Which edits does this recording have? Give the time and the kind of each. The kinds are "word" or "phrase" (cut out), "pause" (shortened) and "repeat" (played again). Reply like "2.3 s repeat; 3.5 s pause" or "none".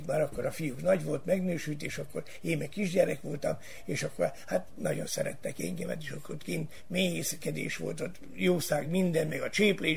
none